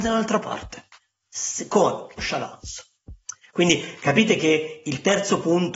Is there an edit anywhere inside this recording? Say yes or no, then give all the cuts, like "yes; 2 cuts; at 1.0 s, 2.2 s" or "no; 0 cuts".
yes; 1 cut; at 2.2 s